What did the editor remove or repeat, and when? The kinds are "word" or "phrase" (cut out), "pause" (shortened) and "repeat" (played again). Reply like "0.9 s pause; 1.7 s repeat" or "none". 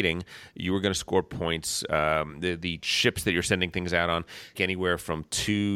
4.5 s phrase